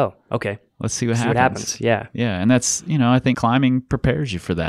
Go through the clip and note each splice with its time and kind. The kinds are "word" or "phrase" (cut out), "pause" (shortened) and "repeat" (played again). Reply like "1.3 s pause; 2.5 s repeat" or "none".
3.3 s word

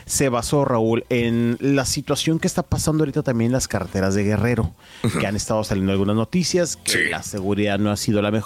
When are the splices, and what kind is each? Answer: none

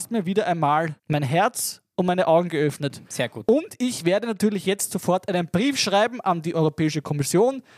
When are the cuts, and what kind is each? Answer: 1.0 s pause

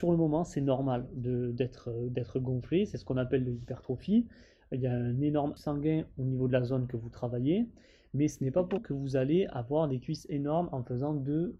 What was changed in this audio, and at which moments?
5.6 s word; 8.8 s word

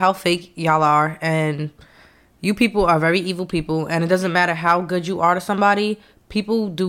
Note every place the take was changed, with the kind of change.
none

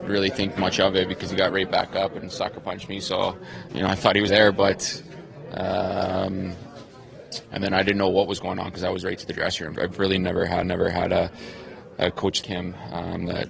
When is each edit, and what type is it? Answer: 3.7 s word; 4.3 s word; 10.6 s repeat; 12.4 s word

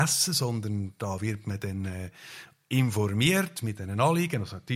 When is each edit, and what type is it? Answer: none

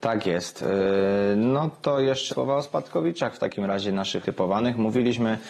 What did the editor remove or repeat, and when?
2.3 s word; 4.2 s word

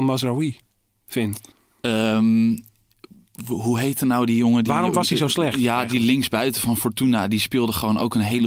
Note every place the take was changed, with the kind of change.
1.5 s pause

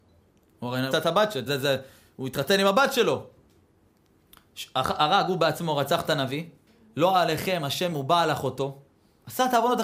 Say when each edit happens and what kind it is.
0.9 s word; 1.5 s word; 6.7 s pause; 7.9 s word

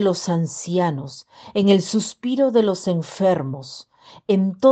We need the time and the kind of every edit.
none

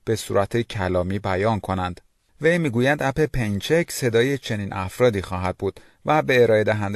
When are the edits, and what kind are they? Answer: none

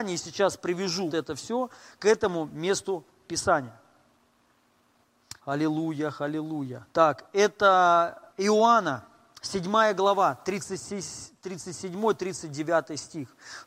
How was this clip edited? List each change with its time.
1.1 s word; 5.4 s pause; 6.9 s pause; 8.3 s pause

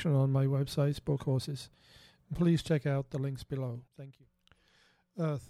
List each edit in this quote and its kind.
1.2 s word; 3.9 s pause

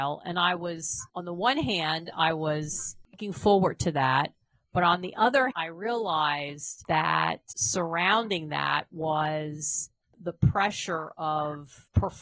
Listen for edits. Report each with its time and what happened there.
1.1 s pause; 5.5 s word

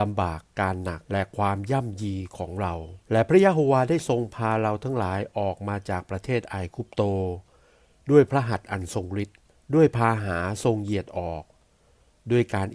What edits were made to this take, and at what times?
1.0 s pause; 3.0 s pause; 9.5 s pause

